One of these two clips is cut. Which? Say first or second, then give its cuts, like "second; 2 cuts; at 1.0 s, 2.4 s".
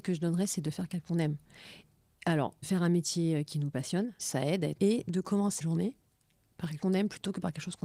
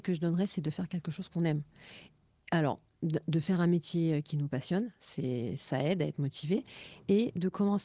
first; 6 cuts; at 1.0 s, 2.6 s, 4.2 s, 4.8 s, 5.6 s, 6.8 s